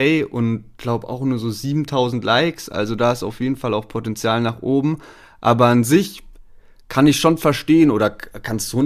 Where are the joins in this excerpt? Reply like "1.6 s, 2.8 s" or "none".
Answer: none